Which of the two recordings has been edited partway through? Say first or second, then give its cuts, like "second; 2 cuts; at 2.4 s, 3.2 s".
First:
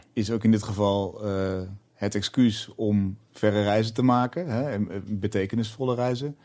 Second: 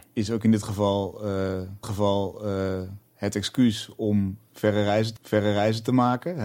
second; 2 cuts; at 1.8 s, 5.2 s